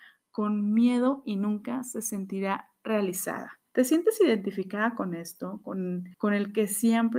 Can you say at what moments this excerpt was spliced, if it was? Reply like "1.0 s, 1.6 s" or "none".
3.7 s, 6.1 s